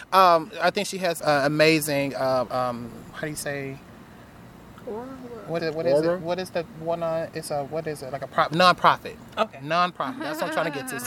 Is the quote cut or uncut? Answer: cut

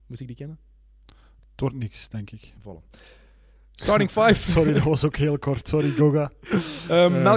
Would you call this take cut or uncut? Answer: uncut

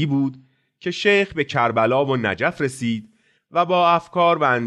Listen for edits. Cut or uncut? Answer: uncut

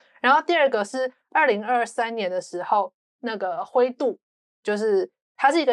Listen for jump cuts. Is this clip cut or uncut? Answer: uncut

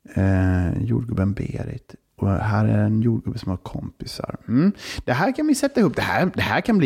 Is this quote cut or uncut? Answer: uncut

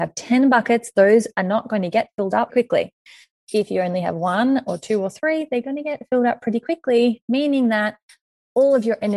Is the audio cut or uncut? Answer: cut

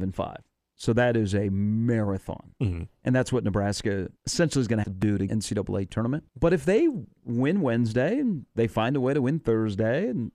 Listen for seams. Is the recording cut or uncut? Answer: cut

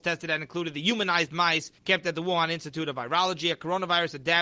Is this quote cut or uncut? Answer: cut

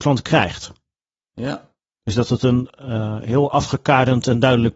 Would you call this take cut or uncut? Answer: cut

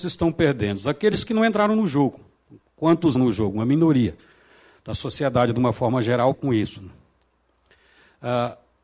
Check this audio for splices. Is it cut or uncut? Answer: cut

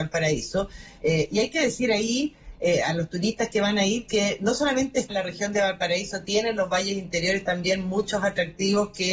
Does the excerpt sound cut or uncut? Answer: cut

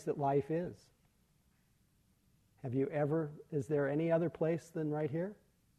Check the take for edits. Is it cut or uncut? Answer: uncut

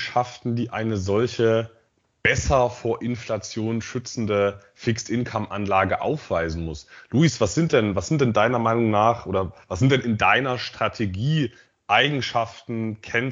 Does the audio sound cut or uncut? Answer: uncut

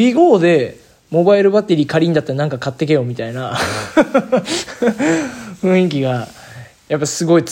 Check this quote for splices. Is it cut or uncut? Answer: uncut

